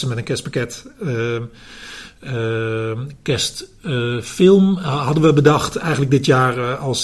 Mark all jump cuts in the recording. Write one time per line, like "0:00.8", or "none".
none